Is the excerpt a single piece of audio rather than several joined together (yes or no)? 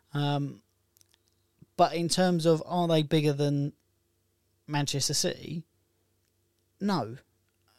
yes